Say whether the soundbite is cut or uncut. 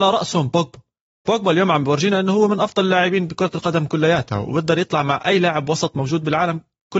uncut